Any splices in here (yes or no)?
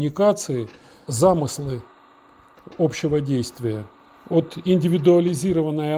yes